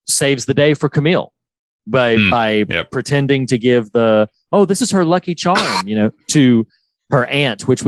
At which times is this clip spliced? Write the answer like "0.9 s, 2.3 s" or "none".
none